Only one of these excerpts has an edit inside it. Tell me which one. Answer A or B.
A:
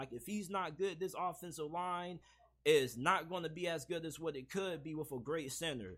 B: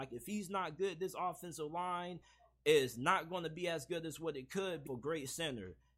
B